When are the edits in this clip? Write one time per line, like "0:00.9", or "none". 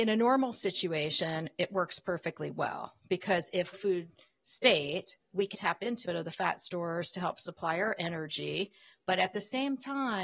0:03.7
0:05.5
0:06.0

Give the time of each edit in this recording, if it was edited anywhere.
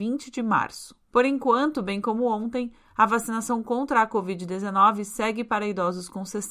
0:01.0

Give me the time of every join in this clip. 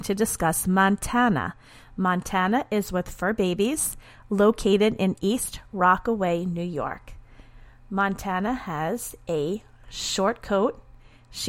none

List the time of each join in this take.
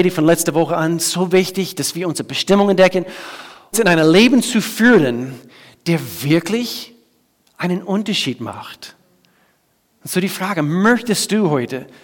0:03.7

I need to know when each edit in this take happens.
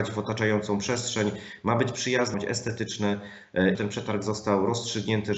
0:02.3
0:03.7

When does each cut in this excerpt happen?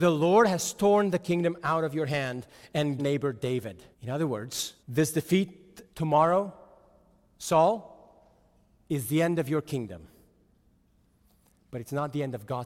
0:03.0
0:03.9
0:04.8
0:05.9

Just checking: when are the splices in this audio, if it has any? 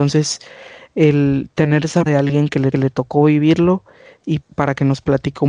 0:02.1
0:02.7
0:04.4

